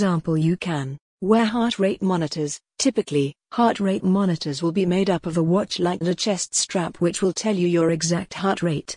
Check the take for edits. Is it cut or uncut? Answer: cut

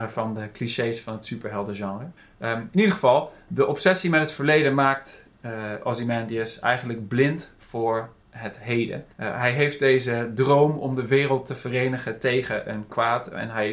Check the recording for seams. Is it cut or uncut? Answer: cut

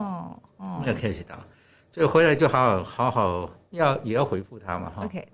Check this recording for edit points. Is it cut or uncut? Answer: uncut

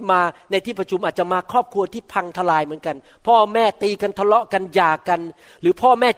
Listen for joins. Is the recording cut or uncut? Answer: uncut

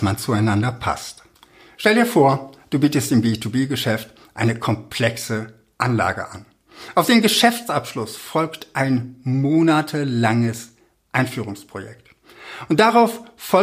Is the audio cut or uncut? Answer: uncut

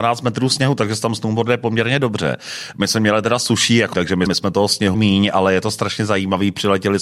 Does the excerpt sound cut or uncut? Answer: cut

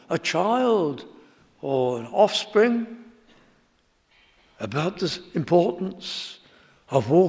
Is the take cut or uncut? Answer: uncut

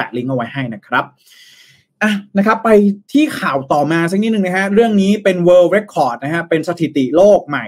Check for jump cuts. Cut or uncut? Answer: uncut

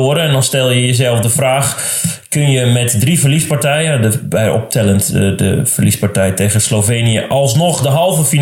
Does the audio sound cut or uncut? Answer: uncut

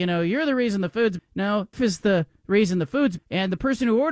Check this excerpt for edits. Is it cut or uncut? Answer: cut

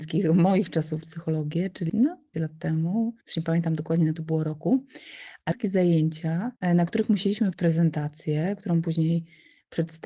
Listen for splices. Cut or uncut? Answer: cut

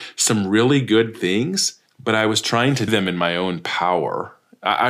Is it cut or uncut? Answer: cut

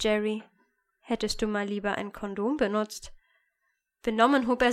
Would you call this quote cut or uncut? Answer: uncut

